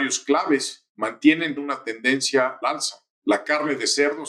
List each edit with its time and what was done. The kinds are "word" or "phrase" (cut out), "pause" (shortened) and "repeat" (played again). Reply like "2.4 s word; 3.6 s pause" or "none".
1.6 s word; 2.6 s word

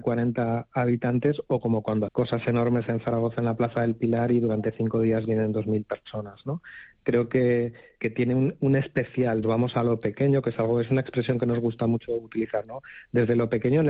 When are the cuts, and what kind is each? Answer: 2.1 s word; 8.0 s word; 9.4 s phrase

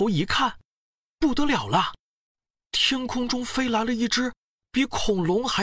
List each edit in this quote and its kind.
none

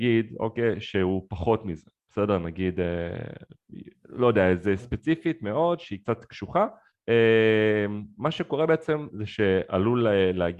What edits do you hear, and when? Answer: 4.8 s word; 6.9 s pause

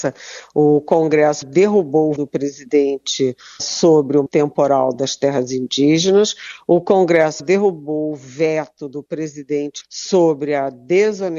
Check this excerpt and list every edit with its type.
1.4 s word; 2.2 s word; 3.6 s word; 4.3 s word; 7.4 s word; 9.8 s word

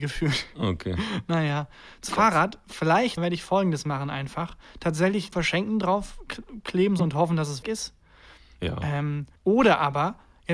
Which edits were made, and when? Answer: 2.1 s word; 3.2 s word; 5.3 s word; 7.0 s phrase; 7.6 s word; 9.4 s pause

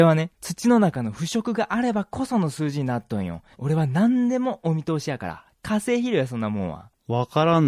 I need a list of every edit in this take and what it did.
3.5 s pause

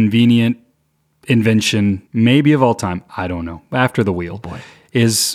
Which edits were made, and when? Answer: 2.1 s pause

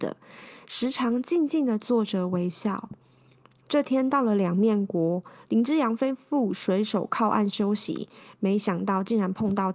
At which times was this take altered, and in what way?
none

